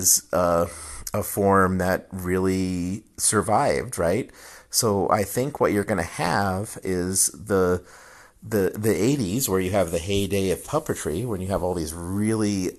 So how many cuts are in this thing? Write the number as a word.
zero